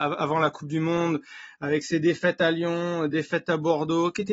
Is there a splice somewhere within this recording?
no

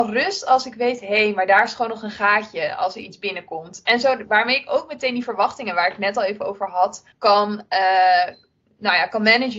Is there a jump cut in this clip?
yes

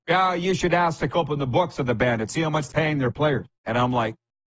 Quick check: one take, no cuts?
no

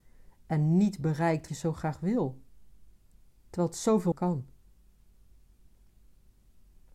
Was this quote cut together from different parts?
yes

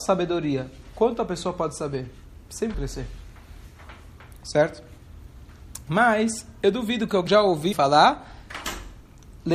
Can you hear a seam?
yes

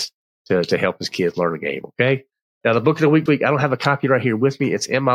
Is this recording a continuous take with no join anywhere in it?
no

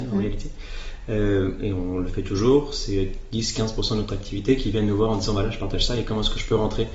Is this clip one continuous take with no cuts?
yes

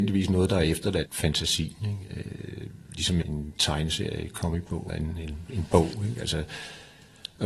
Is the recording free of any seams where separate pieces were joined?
no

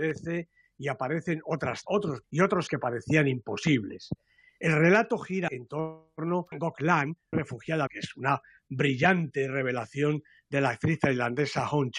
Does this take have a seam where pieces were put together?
yes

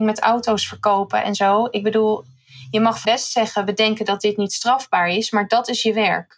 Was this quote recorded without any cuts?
no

